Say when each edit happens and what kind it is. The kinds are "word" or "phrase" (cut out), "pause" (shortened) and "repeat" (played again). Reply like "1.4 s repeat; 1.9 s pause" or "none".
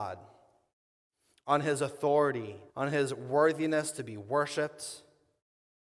2.7 s pause